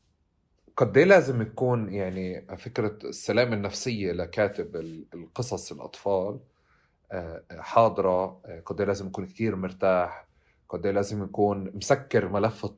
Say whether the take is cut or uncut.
uncut